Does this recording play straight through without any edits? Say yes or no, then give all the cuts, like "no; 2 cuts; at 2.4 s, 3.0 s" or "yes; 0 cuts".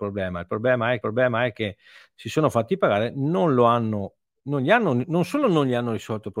no; 1 cut; at 1.0 s